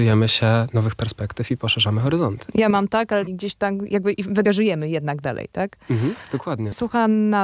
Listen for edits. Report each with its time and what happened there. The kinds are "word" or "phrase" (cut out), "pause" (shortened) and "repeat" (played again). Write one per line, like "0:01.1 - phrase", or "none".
0:03.3 - phrase
0:04.4 - word